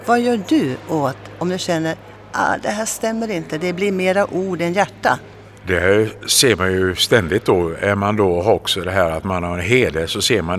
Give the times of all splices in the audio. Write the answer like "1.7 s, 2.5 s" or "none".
5.6 s